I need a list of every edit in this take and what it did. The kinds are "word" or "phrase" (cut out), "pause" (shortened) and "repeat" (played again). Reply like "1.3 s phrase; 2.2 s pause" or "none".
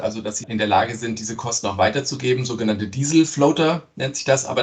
none